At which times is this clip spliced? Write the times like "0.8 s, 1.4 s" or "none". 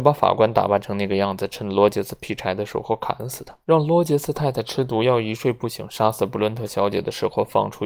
3.6 s